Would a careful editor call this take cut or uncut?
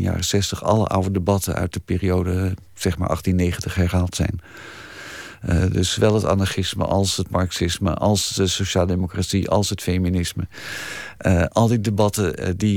uncut